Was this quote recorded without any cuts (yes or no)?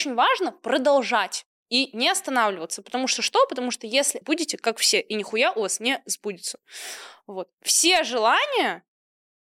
no